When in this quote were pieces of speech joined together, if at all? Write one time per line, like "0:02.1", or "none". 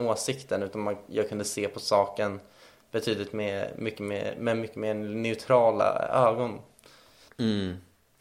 none